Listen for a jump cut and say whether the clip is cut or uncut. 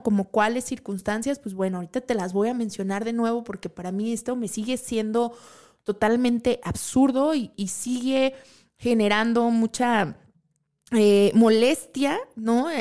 cut